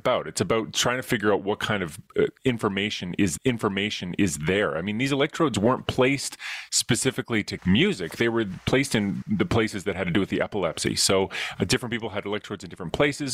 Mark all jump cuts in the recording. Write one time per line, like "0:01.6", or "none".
0:03.4
0:07.6
0:09.2